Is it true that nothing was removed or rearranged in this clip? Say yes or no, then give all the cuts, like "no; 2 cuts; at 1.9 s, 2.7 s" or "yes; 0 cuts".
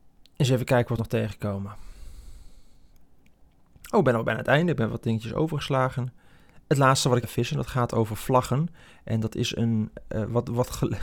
no; 2 cuts; at 1.0 s, 7.2 s